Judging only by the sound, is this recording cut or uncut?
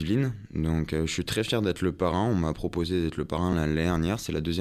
uncut